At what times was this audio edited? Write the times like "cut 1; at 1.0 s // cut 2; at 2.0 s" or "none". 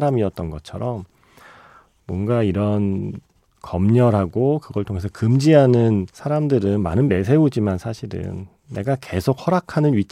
cut 1; at 6.1 s // cut 2; at 7.1 s